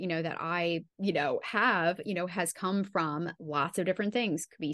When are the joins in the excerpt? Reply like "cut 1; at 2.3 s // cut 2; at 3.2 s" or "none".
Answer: cut 1; at 0.9 s